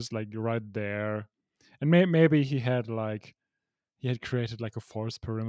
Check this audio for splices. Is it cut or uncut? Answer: uncut